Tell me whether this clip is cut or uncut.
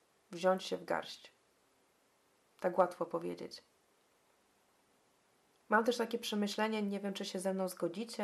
uncut